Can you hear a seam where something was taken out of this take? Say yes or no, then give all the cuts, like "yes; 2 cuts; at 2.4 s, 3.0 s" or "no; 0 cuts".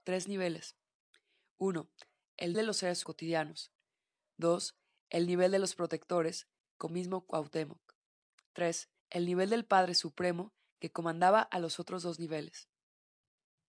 yes; 4 cuts; at 2.5 s, 3.0 s, 6.9 s, 9.0 s